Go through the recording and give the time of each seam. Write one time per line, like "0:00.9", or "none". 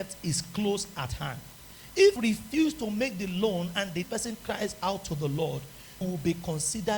0:02.2
0:04.0
0:06.0